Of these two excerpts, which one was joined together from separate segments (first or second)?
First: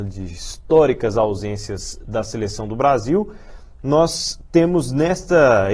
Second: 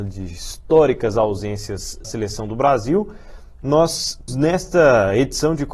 second